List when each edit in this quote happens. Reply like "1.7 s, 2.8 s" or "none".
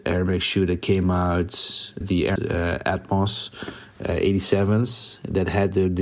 2.0 s, 2.4 s